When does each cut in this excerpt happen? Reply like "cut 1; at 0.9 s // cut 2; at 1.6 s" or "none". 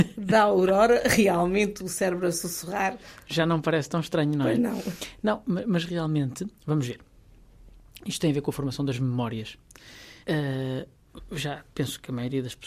cut 1; at 6.6 s // cut 2; at 10.2 s // cut 3; at 11.7 s